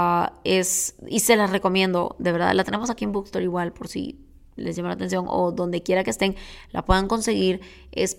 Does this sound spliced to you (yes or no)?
no